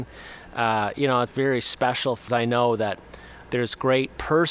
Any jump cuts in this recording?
yes; 2 cuts; at 1.3 s, 2.3 s

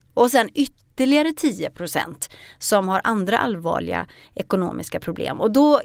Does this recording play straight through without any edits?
yes; 0 cuts

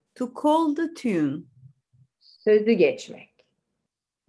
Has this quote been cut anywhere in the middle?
no; 0 cuts

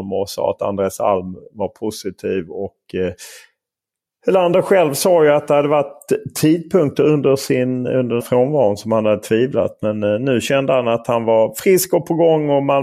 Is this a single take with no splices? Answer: no; 1 cut; at 8.2 s

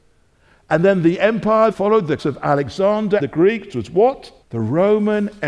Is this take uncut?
no; 4 cuts; at 1.7 s, 2.2 s, 3.2 s, 4.4 s

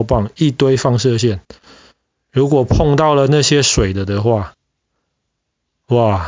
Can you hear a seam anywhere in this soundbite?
no; 0 cuts

